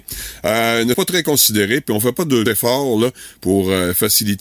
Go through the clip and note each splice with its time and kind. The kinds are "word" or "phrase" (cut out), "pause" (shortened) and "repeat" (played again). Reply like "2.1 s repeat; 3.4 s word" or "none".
0.9 s word; 2.5 s word